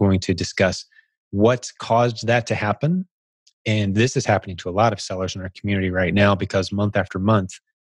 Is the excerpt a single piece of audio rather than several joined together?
yes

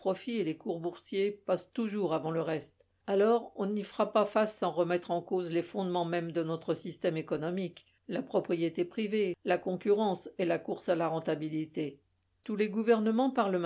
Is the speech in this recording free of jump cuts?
yes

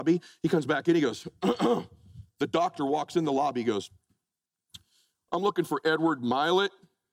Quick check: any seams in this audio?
no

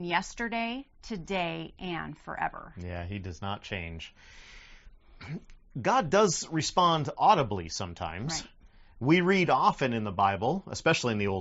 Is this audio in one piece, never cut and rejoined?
yes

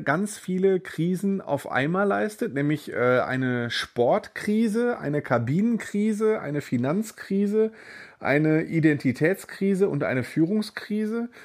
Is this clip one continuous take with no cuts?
yes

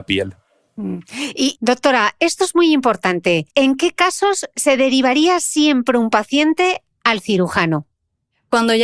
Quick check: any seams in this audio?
yes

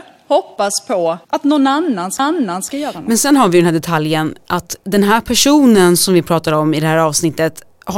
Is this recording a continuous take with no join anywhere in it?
no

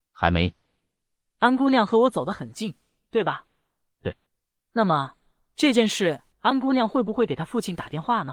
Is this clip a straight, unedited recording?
no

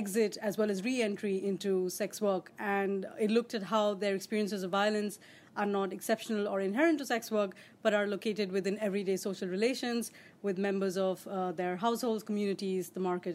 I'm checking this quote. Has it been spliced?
no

